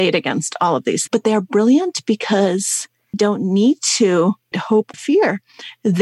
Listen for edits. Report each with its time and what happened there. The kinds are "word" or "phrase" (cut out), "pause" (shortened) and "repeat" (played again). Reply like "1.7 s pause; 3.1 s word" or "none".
1.1 s word; 3.1 s word; 4.5 s word; 4.9 s word